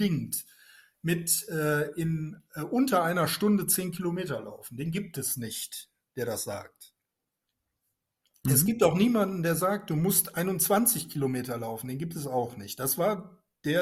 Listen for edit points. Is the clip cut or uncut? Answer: uncut